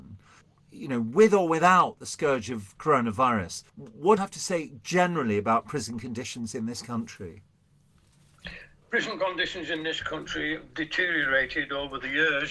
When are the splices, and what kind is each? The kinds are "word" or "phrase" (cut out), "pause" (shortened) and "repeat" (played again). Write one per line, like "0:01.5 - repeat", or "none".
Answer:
0:03.7 - pause
0:04.2 - word

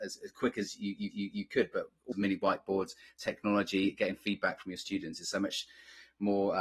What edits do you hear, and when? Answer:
0:01.1 - repeat
0:02.1 - phrase

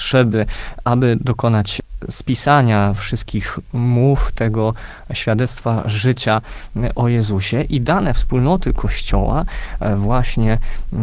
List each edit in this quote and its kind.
none

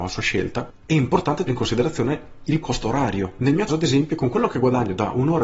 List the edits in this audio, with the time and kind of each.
0:01.5 - word
0:02.6 - word
0:03.7 - word

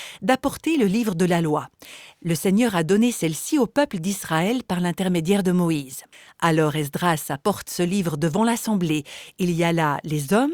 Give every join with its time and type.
0:06.1 - pause

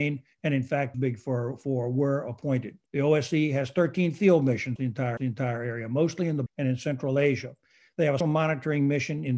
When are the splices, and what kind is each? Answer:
0:00.9 - word
0:02.9 - pause
0:04.8 - word
0:05.2 - repeat
0:06.5 - word
0:08.2 - word

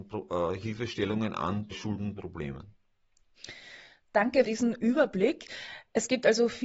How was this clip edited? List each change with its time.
0:01.7 - word
0:04.4 - word

